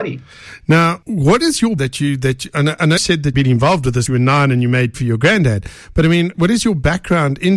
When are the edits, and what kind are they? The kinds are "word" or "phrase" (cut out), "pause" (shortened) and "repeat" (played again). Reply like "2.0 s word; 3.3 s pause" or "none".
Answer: 1.0 s word; 1.8 s word; 3.0 s word; 3.3 s word; 4.1 s word; 4.9 s word; 6.3 s word